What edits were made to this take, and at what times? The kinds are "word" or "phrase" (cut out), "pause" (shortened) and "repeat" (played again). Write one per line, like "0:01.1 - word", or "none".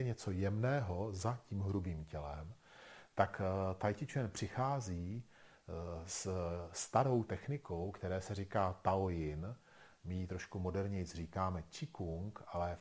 0:07.3 - word